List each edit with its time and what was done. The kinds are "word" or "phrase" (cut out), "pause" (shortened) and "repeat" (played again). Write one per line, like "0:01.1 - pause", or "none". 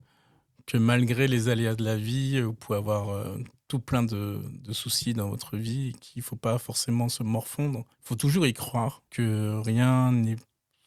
0:07.9 - pause
0:09.1 - pause